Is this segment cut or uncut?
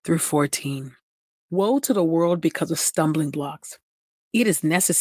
uncut